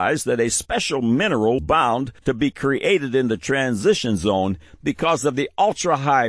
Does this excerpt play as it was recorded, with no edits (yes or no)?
no